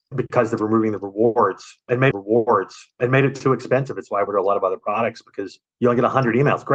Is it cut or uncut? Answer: cut